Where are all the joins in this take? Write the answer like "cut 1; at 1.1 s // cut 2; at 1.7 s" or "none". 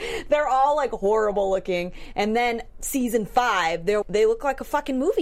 cut 1; at 4.0 s